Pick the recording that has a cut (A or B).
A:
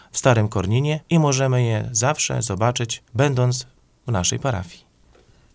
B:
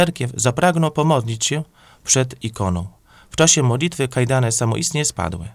A